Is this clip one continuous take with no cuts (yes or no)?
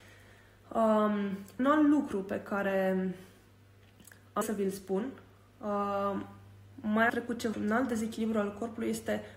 no